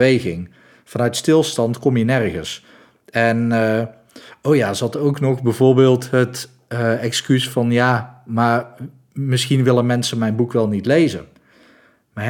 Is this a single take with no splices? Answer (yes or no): yes